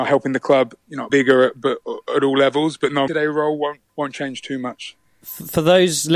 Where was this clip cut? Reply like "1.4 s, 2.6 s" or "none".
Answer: 1.1 s, 3.1 s, 3.9 s